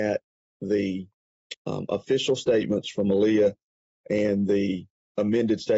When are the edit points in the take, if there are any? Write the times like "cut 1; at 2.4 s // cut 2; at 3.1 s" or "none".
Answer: none